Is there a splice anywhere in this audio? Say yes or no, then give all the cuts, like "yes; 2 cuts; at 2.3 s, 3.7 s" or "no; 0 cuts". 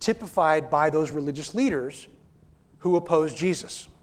no; 0 cuts